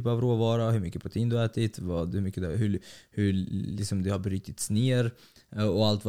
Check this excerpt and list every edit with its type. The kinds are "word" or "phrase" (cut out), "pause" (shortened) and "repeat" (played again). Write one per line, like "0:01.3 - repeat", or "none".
none